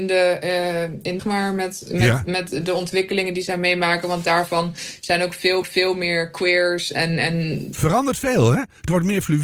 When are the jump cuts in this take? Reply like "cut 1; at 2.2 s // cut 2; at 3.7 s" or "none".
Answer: cut 1; at 1.2 s // cut 2; at 5.6 s